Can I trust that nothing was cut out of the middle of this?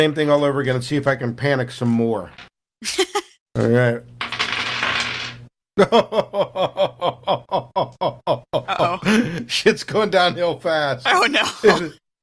yes; 0 cuts

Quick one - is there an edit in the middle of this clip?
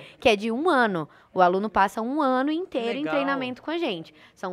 no; 0 cuts

